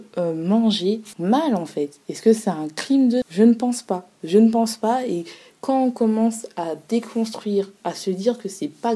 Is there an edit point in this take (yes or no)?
no